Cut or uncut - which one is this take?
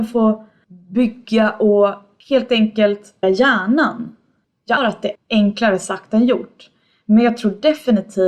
cut